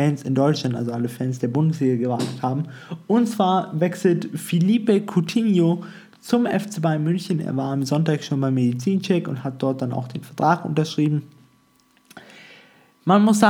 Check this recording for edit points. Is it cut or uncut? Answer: uncut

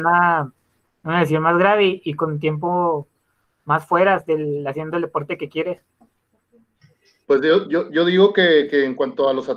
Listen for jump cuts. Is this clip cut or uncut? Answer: uncut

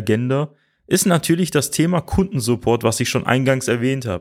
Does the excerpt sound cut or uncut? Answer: uncut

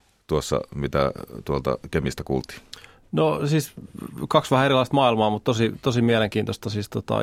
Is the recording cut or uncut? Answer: uncut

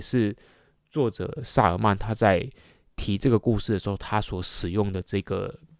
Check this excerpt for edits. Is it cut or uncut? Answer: uncut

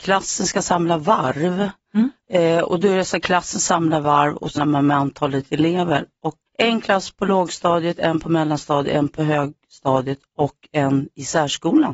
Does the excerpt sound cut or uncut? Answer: cut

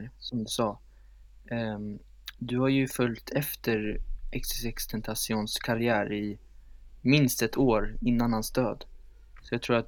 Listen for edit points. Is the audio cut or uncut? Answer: uncut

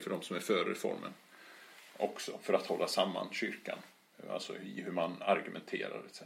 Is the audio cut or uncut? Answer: uncut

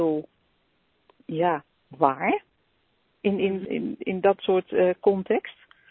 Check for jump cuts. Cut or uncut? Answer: cut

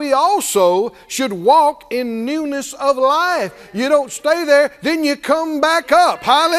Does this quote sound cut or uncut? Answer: uncut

